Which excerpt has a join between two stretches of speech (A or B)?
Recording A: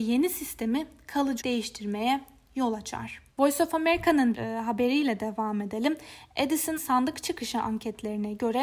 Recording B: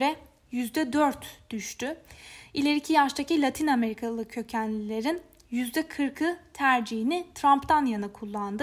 A